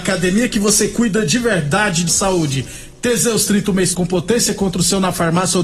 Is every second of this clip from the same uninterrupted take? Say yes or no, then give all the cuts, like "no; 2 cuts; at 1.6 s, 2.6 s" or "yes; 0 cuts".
no; 2 cuts; at 2.1 s, 3.9 s